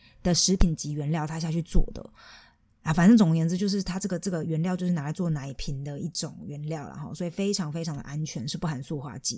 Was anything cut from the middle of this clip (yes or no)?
no